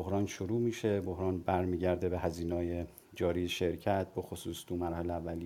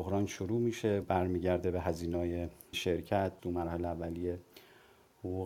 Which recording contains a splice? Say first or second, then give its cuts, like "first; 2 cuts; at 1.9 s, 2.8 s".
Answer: second; 3 cuts; at 1.0 s, 2.7 s, 3.4 s